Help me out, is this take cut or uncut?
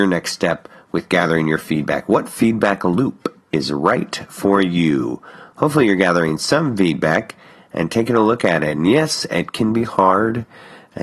uncut